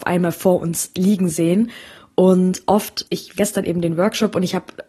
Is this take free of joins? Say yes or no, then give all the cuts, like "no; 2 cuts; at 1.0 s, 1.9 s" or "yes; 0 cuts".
no; 2 cuts; at 3.1 s, 3.4 s